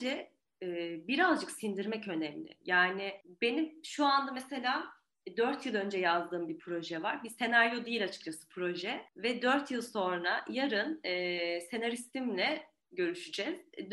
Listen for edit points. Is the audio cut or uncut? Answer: cut